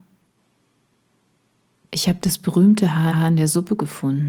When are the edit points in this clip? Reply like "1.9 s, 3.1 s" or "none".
3.1 s